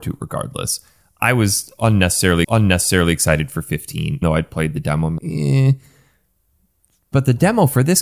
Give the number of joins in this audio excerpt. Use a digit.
3